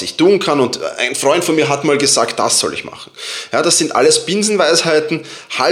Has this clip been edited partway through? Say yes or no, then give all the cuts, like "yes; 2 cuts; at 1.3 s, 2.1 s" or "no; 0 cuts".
no; 0 cuts